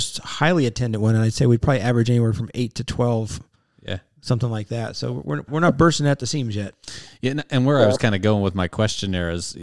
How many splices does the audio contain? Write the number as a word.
one